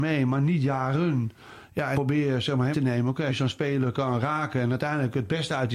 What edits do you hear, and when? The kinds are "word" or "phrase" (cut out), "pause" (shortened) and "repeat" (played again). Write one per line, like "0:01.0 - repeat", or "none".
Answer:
0:01.9 - word
0:02.7 - word
0:03.3 - word